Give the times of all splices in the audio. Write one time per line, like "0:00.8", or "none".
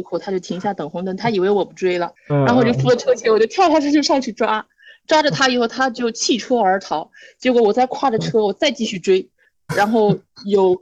0:02.2